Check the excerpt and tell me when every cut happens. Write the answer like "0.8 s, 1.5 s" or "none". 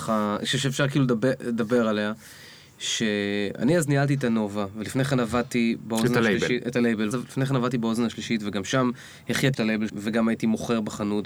7.1 s, 9.5 s, 9.9 s